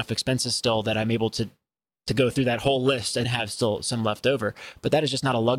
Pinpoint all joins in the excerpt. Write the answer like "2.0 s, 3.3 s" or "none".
3.2 s